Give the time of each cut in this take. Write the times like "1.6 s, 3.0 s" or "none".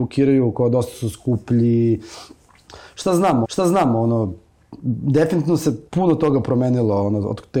3.4 s, 5.9 s